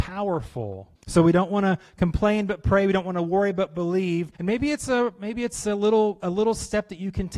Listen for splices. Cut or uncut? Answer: cut